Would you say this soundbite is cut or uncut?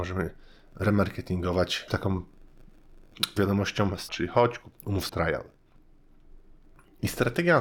cut